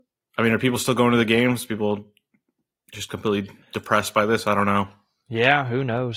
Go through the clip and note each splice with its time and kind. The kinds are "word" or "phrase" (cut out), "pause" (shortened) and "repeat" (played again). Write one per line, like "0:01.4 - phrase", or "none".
0:02.6 - pause
0:03.6 - pause

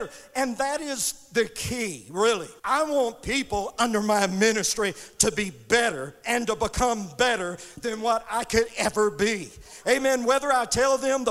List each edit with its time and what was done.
0:02.6 - pause

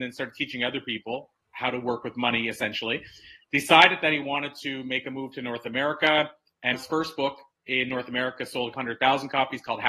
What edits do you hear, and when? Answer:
0:01.4 - word
0:06.7 - word
0:08.7 - word

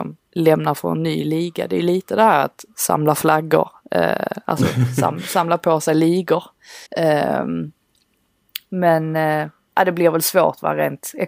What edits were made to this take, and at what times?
0:06.9 - pause

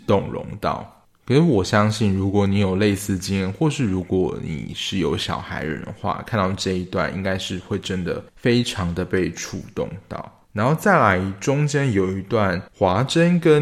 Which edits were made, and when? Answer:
0:08.3 - pause
0:10.4 - pause
0:12.7 - pause

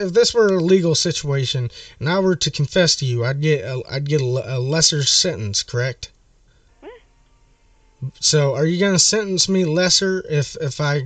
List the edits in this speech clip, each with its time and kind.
0:06.5 - pause

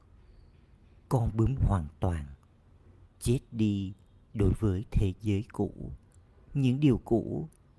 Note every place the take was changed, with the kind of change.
0:01.6 - word
0:03.0 - phrase

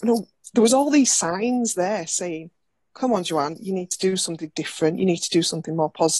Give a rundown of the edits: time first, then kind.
none

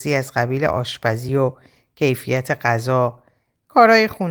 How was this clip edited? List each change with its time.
none

